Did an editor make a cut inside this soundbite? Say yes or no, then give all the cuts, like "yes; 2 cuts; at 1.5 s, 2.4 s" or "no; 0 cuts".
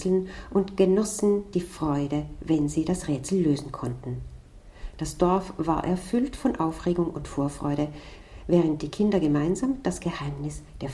no; 0 cuts